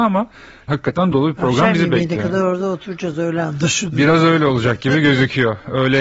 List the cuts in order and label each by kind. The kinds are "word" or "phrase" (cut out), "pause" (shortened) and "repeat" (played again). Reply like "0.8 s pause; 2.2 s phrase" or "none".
1.1 s word